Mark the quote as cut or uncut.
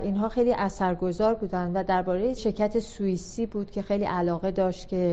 cut